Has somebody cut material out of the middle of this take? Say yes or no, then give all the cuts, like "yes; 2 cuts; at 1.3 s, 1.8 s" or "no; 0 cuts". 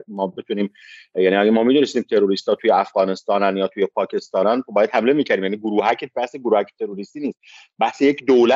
no; 0 cuts